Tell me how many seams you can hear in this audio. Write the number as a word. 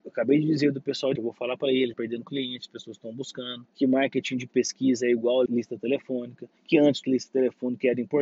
six